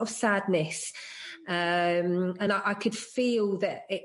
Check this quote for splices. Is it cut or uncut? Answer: uncut